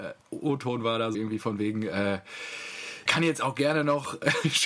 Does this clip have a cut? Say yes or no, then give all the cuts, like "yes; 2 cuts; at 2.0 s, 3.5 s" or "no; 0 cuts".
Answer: yes; 2 cuts; at 1.1 s, 3.1 s